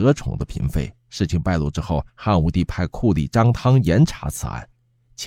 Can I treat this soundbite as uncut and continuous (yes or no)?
no